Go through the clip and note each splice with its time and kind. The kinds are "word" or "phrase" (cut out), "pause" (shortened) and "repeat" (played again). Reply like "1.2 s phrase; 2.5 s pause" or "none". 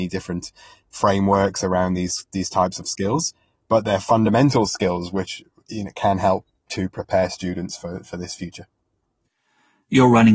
none